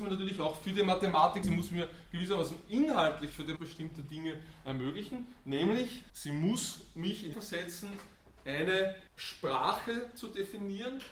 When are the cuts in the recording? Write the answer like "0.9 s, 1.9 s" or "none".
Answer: 1.4 s, 3.6 s, 6.1 s, 7.3 s, 9.1 s